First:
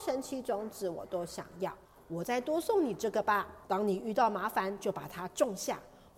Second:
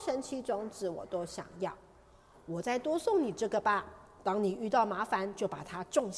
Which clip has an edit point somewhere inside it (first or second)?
first